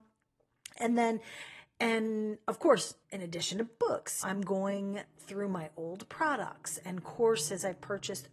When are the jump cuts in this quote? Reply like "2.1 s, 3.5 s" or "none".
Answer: 3.0 s